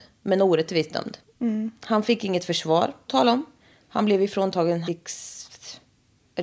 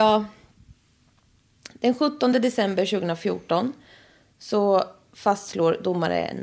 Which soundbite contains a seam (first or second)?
first